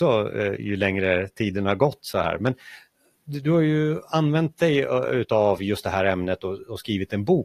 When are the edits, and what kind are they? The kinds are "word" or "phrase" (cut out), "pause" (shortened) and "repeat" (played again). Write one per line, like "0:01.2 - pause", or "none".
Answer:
none